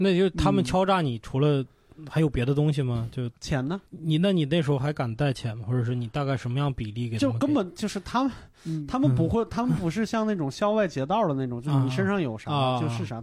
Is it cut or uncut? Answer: cut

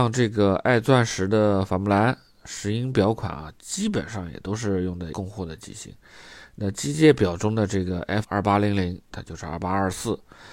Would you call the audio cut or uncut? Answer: cut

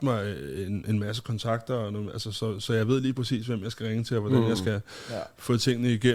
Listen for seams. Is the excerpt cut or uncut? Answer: uncut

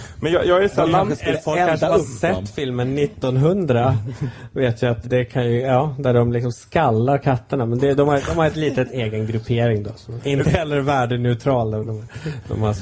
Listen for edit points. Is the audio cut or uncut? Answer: cut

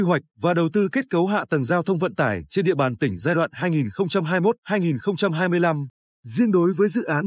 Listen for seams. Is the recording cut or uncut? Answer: uncut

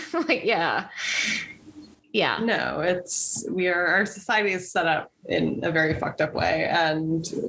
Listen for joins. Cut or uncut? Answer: uncut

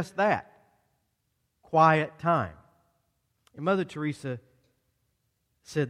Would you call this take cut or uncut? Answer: uncut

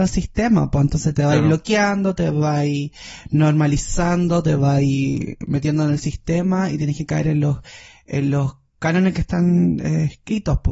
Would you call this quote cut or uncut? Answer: uncut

